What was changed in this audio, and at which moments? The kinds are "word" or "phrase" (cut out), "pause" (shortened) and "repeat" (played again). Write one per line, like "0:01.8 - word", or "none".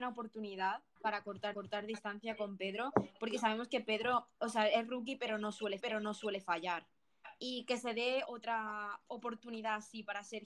0:01.0 - word
0:01.5 - repeat
0:04.3 - pause
0:05.8 - repeat
0:08.2 - word